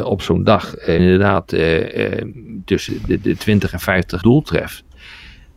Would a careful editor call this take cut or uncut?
cut